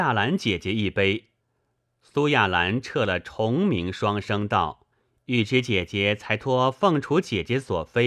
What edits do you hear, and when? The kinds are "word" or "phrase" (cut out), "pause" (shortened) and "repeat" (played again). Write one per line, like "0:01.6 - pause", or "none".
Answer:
0:01.4 - pause
0:04.9 - pause